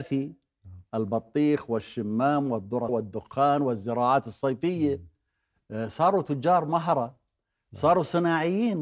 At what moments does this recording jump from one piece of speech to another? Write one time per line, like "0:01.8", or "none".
0:02.9